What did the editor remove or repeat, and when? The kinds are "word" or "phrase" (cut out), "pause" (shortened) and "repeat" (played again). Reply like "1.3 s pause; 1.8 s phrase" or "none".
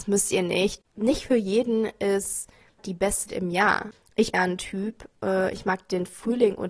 2.8 s word; 3.3 s word; 4.3 s phrase